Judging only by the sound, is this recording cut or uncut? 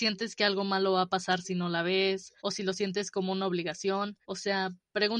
cut